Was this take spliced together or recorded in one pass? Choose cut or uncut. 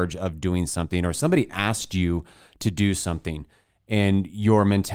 uncut